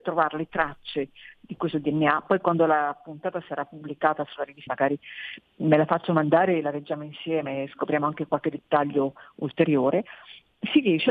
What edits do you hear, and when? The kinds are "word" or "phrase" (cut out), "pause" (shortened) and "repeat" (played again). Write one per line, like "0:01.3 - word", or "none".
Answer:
0:04.7 - word

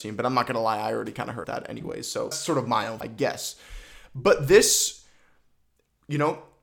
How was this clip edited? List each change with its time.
0:01.4 - word
0:02.3 - word
0:03.0 - word

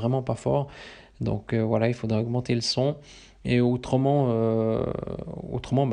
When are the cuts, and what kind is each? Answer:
none

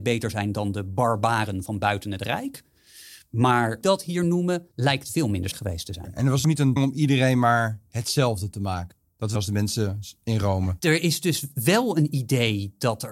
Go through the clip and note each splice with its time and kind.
0:03.8 - phrase
0:04.7 - pause
0:05.5 - word
0:06.4 - word
0:06.8 - word
0:09.4 - phrase

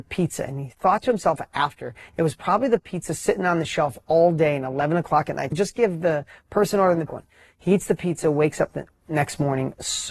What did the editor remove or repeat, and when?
0:05.5 - phrase
0:07.1 - phrase

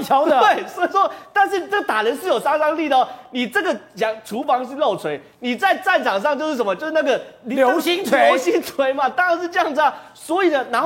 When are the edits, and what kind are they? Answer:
none

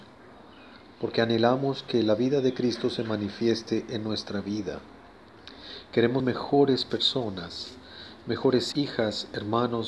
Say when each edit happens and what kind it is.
0:06.2 - word
0:08.7 - word

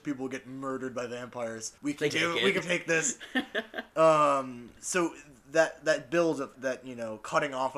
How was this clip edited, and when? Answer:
0:01.8 - pause
0:02.1 - phrase
0:02.6 - word
0:04.8 - pause
0:06.5 - word

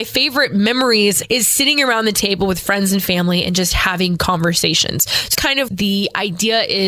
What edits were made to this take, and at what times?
0:04.2 - word
0:05.3 - word
0:05.7 - word

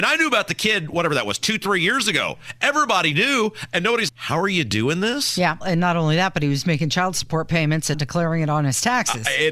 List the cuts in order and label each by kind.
0:04.1 - word
0:05.6 - word
0:07.9 - word

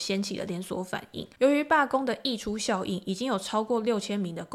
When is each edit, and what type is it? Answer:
0:01.3 - pause

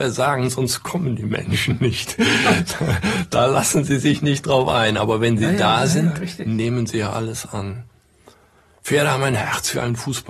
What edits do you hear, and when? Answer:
none

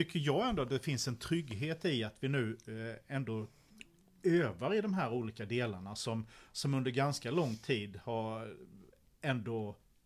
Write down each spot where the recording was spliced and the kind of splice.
none

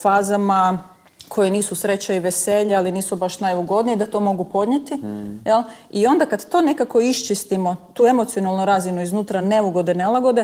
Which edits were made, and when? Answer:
none

